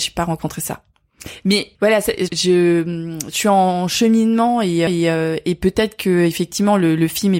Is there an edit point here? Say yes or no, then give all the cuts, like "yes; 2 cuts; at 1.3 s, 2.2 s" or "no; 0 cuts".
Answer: yes; 3 cuts; at 1.7 s, 2.3 s, 4.9 s